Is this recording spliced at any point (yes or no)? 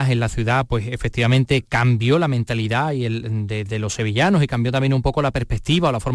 no